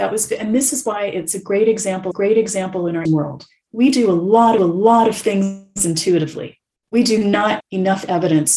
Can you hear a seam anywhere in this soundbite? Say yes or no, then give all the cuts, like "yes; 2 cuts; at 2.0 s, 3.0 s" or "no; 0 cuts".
yes; 5 cuts; at 2.1 s, 3.1 s, 4.6 s, 6.7 s, 7.6 s